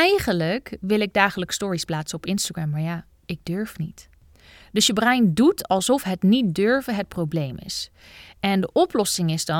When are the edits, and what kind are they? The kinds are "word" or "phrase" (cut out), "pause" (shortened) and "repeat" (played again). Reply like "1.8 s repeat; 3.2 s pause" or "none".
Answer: none